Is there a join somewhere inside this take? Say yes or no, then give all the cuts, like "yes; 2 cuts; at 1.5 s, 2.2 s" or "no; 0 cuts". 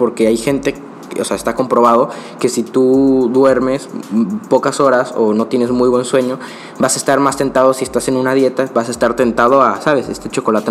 no; 0 cuts